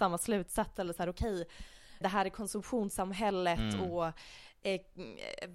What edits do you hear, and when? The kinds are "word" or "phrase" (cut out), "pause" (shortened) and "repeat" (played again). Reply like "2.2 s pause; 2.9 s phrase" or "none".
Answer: 2.0 s word